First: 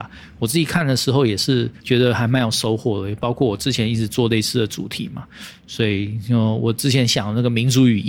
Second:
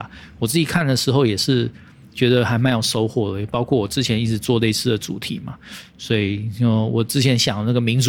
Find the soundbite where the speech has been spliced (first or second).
first